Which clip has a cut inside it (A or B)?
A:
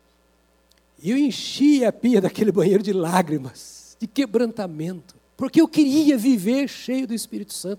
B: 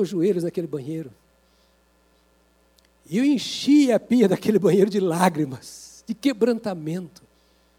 A